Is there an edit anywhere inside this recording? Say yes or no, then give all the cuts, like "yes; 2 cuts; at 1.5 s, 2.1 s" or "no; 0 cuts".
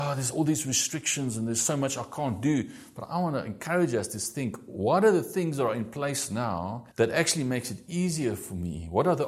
yes; 1 cut; at 6.9 s